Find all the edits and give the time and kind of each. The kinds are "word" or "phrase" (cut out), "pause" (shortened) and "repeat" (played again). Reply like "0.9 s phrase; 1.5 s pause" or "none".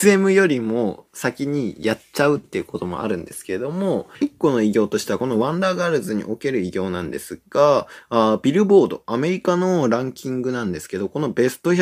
4.1 s pause